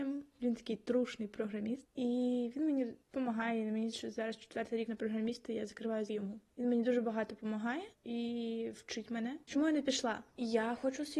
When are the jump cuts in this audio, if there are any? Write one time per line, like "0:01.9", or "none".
0:03.0
0:03.9
0:04.9
0:06.1
0:09.4
0:10.3